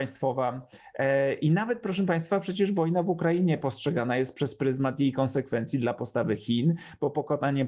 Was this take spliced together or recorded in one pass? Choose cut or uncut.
uncut